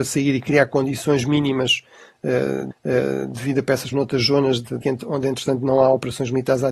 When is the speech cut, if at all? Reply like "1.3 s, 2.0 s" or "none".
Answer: 2.7 s, 3.9 s, 4.8 s